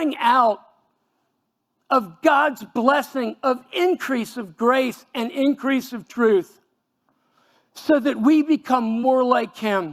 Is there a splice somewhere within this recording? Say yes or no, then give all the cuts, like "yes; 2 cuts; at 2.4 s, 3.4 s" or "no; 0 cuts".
no; 0 cuts